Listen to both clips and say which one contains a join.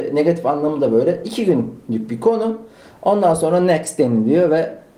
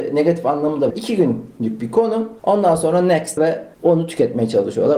second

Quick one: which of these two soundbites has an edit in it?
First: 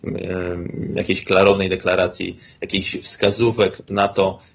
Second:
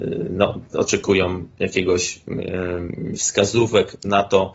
second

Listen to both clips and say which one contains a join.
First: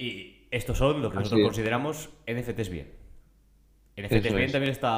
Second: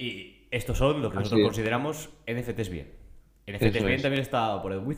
second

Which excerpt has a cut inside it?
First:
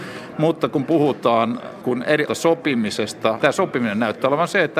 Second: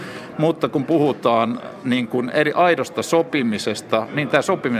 first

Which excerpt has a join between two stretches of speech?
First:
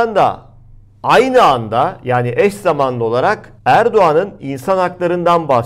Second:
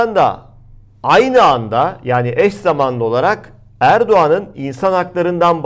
first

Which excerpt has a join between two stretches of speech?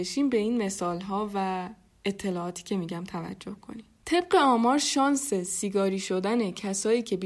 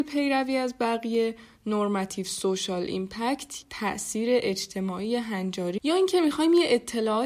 second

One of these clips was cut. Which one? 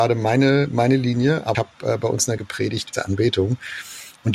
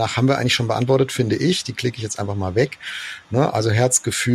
first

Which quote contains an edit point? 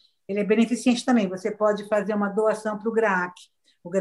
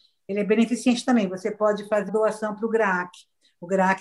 second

